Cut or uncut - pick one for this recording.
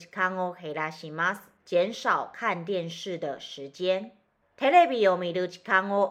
cut